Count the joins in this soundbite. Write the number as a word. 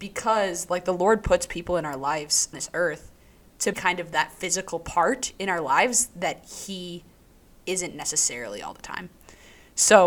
two